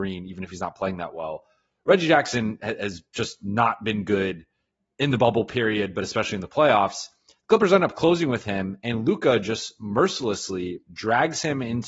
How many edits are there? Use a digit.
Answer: 0